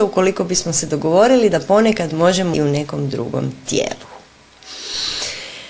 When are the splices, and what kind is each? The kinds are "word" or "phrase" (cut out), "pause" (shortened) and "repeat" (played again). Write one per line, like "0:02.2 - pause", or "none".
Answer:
0:02.5 - word